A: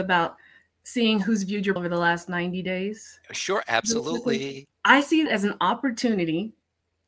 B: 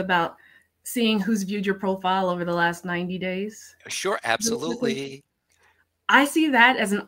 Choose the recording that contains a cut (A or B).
A